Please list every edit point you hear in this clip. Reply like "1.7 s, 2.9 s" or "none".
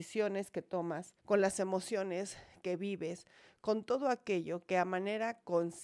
1.2 s

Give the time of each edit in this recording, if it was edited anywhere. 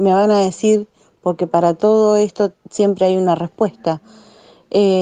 none

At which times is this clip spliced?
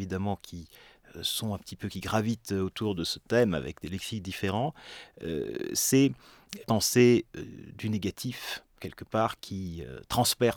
6.6 s, 8.8 s

